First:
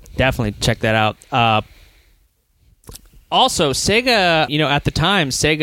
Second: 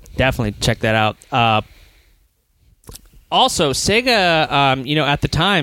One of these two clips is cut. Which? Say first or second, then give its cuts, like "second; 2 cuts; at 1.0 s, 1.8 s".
first; 1 cut; at 4.5 s